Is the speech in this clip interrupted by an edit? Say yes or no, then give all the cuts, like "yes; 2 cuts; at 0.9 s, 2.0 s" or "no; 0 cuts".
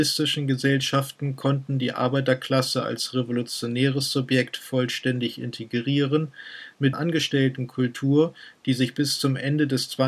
yes; 1 cut; at 6.9 s